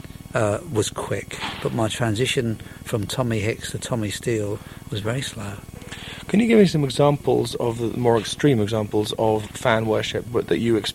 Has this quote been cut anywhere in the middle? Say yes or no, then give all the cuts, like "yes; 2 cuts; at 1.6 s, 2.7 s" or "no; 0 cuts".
no; 0 cuts